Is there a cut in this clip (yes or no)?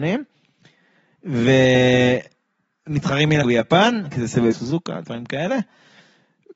yes